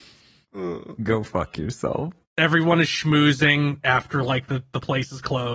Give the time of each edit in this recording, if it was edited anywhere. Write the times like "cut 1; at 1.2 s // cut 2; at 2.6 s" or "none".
none

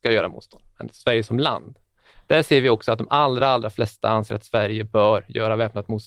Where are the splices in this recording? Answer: none

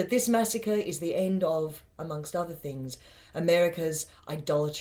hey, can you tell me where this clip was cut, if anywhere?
none

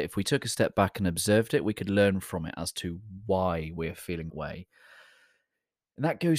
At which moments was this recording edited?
cut 1; at 4.3 s

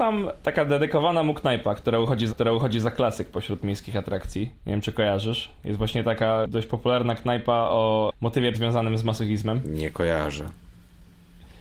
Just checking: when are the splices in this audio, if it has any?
cut 1; at 2.3 s // cut 2; at 4.6 s // cut 3; at 8.5 s

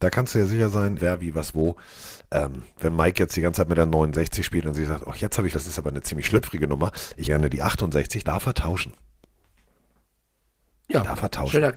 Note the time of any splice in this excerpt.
cut 1; at 1.0 s // cut 2; at 5.5 s // cut 3; at 7.3 s // cut 4; at 8.2 s

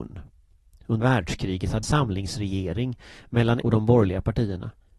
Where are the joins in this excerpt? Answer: cut 1; at 1.0 s // cut 2; at 1.8 s // cut 3; at 3.6 s

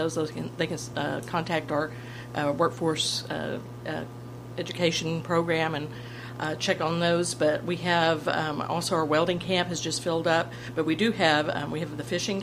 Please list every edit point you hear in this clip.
none

